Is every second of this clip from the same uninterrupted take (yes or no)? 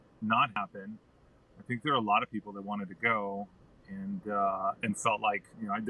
yes